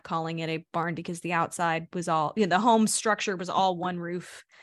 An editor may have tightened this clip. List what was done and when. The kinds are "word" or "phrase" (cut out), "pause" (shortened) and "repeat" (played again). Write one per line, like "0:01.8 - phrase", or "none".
0:01.0 - word